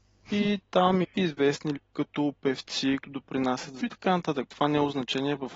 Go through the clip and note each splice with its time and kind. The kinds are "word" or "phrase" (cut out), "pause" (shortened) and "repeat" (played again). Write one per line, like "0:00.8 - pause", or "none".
0:01.0 - word
0:01.8 - word
0:03.0 - word
0:03.8 - word